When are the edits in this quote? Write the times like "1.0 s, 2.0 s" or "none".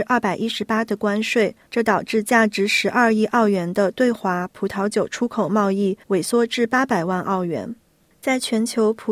1.7 s, 6.0 s

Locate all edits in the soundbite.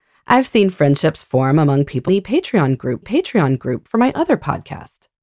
2.1 s, 3.0 s

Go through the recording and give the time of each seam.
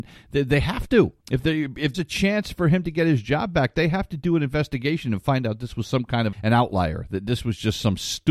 1.2 s, 1.9 s, 6.3 s

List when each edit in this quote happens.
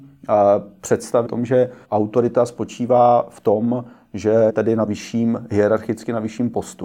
1.3 s, 1.8 s, 4.5 s, 4.9 s

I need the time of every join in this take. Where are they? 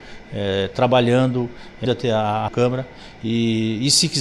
1.9 s, 2.5 s

